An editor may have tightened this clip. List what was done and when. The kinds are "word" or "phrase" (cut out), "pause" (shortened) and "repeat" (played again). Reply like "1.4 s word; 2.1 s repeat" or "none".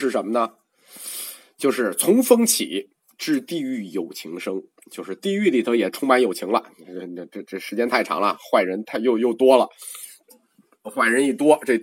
none

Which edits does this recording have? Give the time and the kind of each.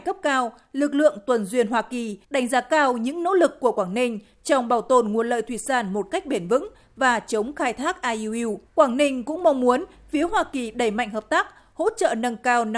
2.2 s pause; 8.7 s pause

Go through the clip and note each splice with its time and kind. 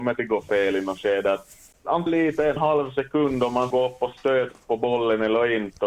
2.1 s phrase; 2.6 s word; 3.7 s word

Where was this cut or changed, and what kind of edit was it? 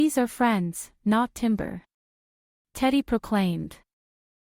none

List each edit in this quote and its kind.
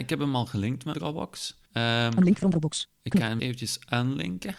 0.9 s word; 1.7 s pause; 3.4 s word

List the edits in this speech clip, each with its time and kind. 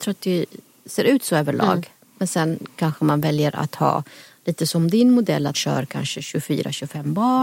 5.5 s word

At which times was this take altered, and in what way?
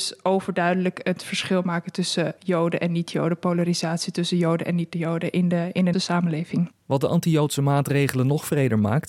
2.4 s word; 5.9 s word; 6.8 s pause

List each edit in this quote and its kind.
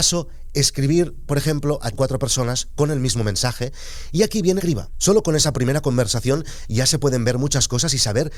1.9 s word; 4.6 s phrase

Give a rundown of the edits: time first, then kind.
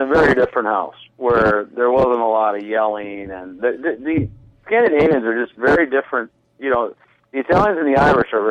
none

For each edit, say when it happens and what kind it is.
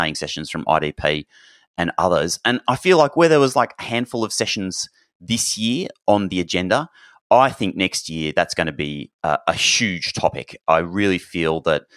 none

